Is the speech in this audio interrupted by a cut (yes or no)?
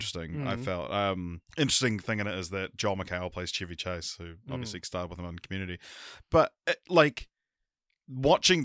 yes